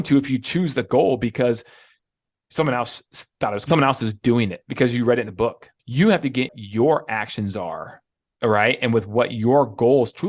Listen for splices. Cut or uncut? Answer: cut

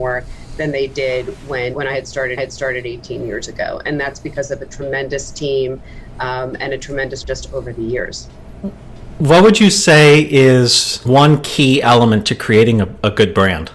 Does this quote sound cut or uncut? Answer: cut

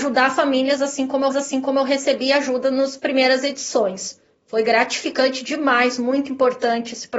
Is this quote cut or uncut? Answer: cut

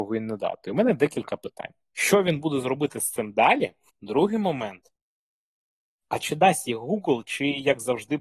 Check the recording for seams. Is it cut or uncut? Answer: uncut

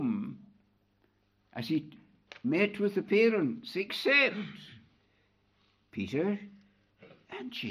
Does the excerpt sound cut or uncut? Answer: uncut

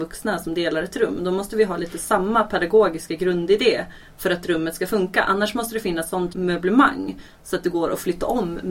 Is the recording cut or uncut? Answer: cut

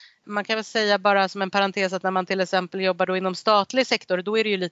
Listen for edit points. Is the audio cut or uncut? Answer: uncut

